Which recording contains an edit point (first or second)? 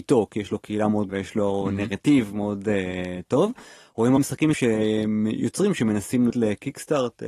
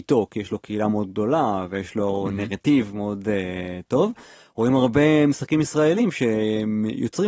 first